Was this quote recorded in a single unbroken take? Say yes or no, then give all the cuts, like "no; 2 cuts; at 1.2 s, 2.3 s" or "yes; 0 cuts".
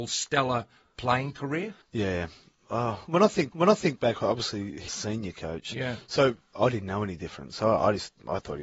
no; 3 cuts; at 1.8 s, 3.5 s, 4.9 s